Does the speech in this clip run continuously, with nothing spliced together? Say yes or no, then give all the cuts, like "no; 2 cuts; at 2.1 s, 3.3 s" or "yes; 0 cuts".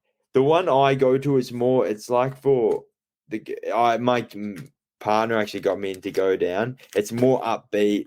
yes; 0 cuts